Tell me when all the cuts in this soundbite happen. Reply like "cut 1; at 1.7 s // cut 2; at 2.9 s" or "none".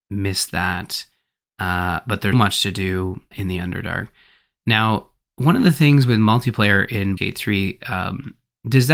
cut 1; at 2.3 s // cut 2; at 3.3 s // cut 3; at 7.2 s